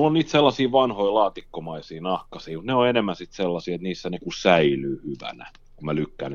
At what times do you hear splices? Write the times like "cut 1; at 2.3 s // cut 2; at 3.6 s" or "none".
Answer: cut 1; at 4.2 s